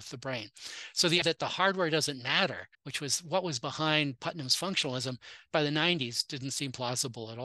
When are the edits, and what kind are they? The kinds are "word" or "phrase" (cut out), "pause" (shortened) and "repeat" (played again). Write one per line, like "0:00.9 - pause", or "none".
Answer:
0:01.2 - word
0:02.7 - pause
0:05.5 - word